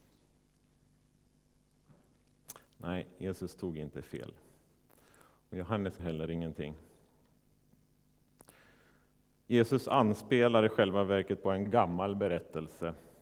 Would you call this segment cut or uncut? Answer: cut